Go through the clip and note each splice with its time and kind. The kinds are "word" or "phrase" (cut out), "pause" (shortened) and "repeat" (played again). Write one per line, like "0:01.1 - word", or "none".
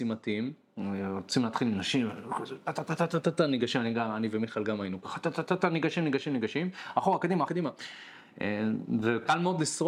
0:07.5 - word